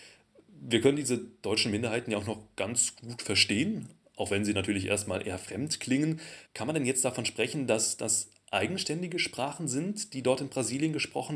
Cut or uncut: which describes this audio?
cut